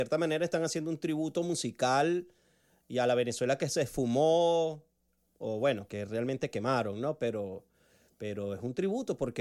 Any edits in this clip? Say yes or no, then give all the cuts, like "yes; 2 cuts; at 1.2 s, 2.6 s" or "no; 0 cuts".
no; 0 cuts